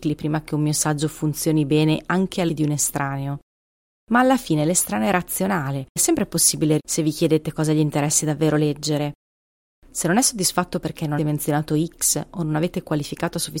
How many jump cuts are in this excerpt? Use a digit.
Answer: 4